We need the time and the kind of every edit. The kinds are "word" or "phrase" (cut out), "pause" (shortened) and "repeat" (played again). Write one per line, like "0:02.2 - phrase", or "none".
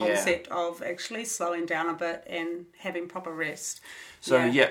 none